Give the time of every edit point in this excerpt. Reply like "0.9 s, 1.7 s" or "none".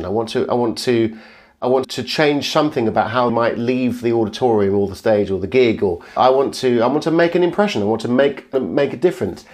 1.8 s, 3.3 s, 6.2 s, 8.5 s